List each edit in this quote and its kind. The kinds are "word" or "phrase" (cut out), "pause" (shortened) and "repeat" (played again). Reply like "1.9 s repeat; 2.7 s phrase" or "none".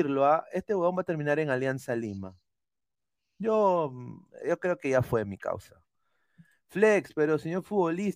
none

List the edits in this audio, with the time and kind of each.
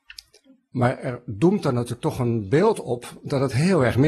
none

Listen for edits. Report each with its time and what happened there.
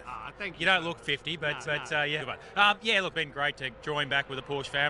1.6 s repeat; 2.2 s phrase; 3.1 s word; 3.8 s word

